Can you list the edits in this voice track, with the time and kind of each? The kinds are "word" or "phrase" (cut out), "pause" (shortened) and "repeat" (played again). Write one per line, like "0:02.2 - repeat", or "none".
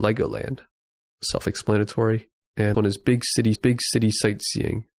0:00.9 - pause
0:02.7 - word
0:03.6 - repeat

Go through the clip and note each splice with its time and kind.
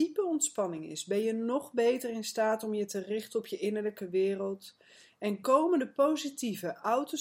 none

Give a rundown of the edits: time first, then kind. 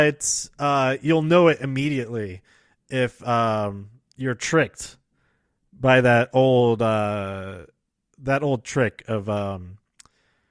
none

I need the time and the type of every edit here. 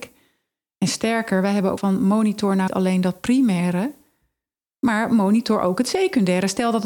0:01.8 - phrase
0:02.7 - word

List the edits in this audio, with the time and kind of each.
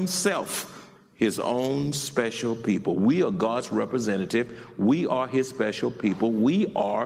none

